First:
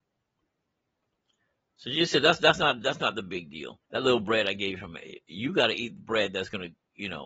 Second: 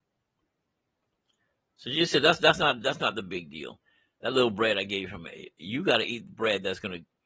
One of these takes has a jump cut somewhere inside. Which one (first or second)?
first